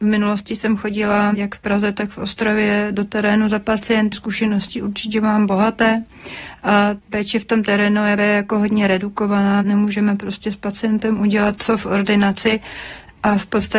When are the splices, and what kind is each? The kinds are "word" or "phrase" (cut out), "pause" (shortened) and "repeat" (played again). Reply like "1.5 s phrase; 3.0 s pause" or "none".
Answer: 4.1 s word; 7.0 s word; 8.2 s word; 11.6 s word

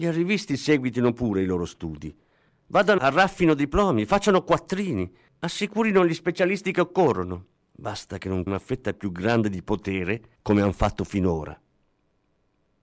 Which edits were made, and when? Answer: 3.0 s word; 7.6 s pause; 8.5 s word

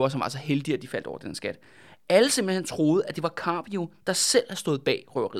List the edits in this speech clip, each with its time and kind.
none

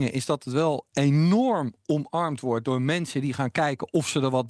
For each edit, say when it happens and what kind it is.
none

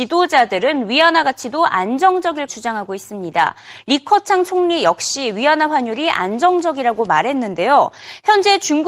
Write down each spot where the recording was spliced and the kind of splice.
2.5 s word

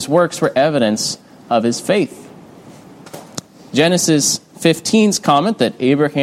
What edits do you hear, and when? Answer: none

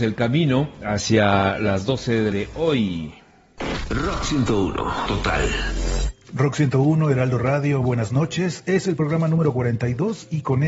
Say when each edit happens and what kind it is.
2.3 s phrase; 5.1 s word; 7.8 s word

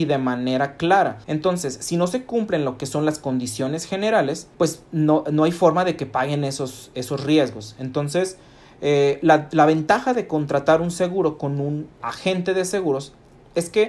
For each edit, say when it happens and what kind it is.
1.2 s pause; 4.5 s pause; 12.0 s word

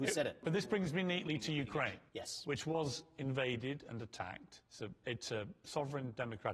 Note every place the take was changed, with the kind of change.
2.1 s pause; 4.7 s pause

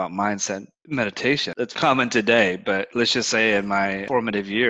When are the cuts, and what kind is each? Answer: 1.8 s word

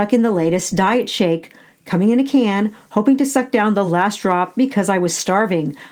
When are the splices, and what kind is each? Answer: none

